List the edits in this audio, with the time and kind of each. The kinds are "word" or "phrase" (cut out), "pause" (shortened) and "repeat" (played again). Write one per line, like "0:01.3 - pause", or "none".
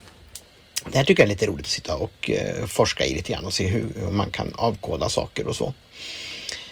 none